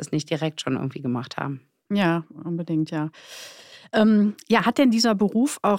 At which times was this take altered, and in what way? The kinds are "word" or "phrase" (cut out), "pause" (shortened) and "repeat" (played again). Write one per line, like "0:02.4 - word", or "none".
none